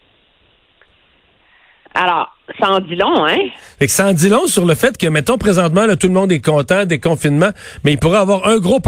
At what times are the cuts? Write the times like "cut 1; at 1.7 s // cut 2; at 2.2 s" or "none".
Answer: none